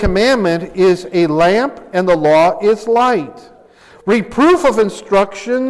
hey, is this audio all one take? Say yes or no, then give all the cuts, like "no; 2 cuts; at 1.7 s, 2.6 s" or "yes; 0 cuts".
yes; 0 cuts